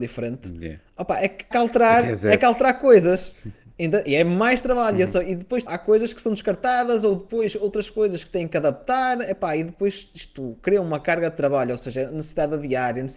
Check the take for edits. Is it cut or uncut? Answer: cut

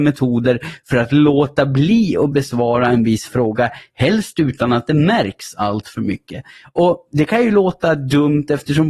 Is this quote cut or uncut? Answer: uncut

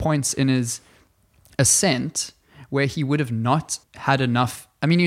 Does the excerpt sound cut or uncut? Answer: cut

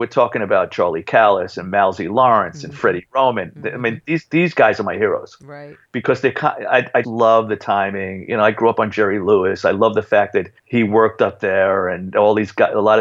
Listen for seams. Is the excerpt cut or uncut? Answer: cut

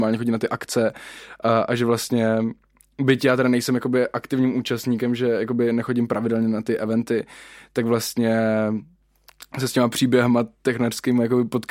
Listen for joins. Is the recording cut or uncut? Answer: uncut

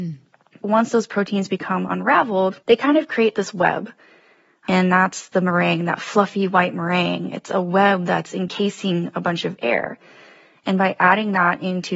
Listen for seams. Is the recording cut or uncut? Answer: uncut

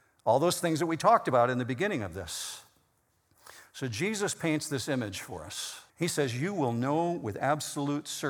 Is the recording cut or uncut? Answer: cut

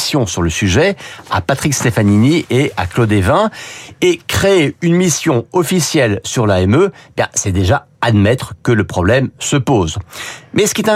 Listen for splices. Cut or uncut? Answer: uncut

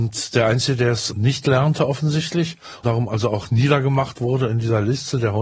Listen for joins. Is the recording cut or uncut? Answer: cut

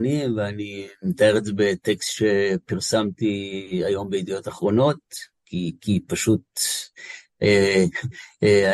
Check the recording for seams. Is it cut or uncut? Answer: uncut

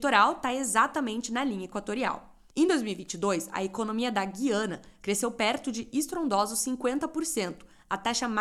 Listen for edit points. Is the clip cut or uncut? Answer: uncut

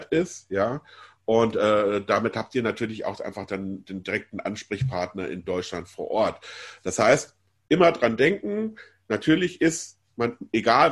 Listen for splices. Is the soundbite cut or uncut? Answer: uncut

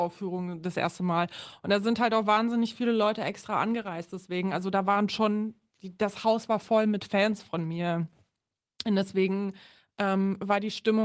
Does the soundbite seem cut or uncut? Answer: uncut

